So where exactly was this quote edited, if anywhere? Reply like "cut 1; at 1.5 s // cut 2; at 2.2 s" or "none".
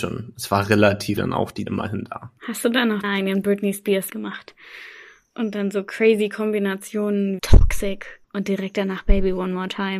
cut 1; at 1.2 s // cut 2; at 1.7 s // cut 3; at 2.4 s // cut 4; at 3.0 s // cut 5; at 4.1 s // cut 6; at 7.4 s // cut 7; at 8.2 s